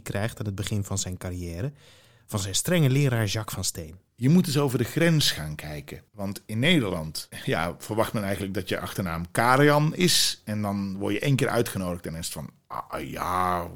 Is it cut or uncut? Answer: cut